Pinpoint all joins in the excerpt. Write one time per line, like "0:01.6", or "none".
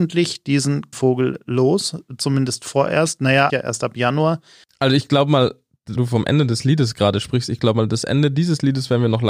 0:00.9
0:03.5
0:06.0